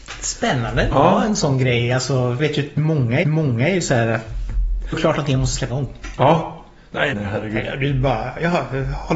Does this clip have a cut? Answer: yes; 6 cuts; at 0.9 s, 2.4 s, 3.2 s, 4.9 s, 5.7 s, 7.1 s

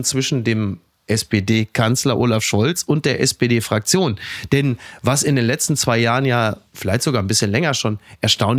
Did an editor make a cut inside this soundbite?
yes; 1 cut; at 6.7 s

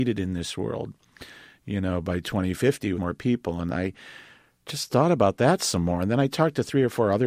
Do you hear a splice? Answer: yes; 1 cut; at 2.9 s

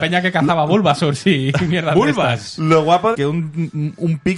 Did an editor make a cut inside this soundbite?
yes; 1 cut; at 3.1 s

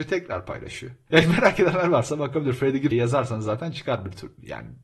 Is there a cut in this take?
yes; 1 cut; at 2.9 s

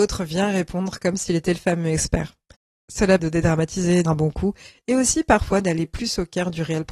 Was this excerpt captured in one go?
no; 2 cuts; at 3.2 s, 4.1 s

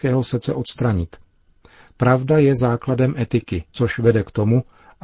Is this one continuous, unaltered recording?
no; 1 cut; at 3.7 s

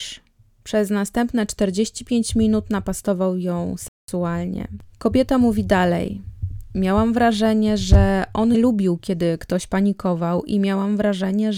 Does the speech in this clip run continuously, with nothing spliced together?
no; 2 cuts; at 6.7 s, 8.5 s

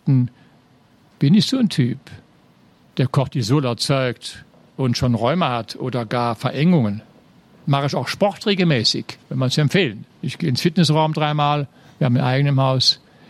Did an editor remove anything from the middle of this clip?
yes; 2 cuts; at 9.2 s, 10.1 s

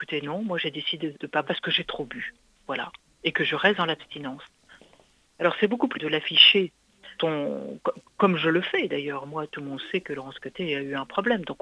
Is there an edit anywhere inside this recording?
yes; 4 cuts; at 1.1 s, 1.4 s, 5.9 s, 7.2 s

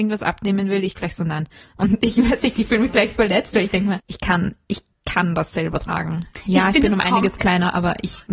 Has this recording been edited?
no; 0 cuts

